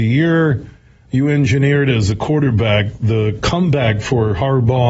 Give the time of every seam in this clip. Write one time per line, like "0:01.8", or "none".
none